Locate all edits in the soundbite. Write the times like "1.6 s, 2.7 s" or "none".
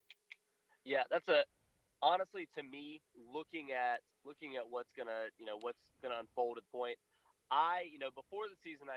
3.1 s, 4.1 s, 6.7 s